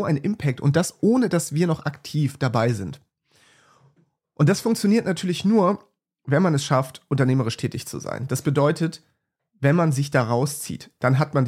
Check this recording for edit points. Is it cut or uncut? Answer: uncut